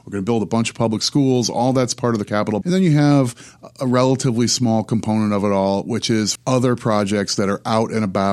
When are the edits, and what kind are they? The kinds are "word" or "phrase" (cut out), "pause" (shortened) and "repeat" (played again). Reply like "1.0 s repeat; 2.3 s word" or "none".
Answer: 2.6 s word; 6.4 s word